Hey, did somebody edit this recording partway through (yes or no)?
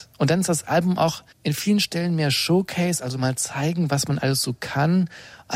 yes